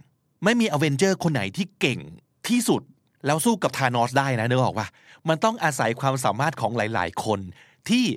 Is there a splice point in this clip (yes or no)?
no